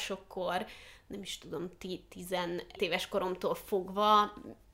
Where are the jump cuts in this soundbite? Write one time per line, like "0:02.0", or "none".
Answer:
0:02.8